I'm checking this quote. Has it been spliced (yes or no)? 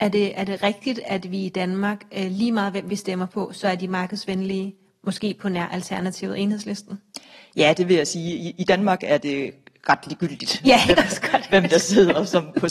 no